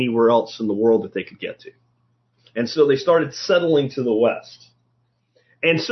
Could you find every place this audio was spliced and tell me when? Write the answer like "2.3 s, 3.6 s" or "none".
none